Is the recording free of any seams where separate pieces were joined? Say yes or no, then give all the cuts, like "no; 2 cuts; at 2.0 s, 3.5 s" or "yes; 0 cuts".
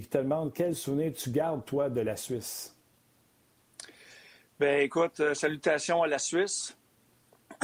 yes; 0 cuts